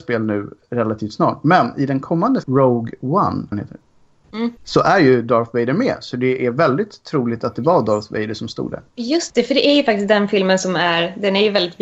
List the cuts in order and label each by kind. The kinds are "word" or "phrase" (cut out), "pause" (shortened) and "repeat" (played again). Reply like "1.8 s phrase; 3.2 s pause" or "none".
2.4 s word; 3.5 s word; 4.6 s pause; 8.9 s pause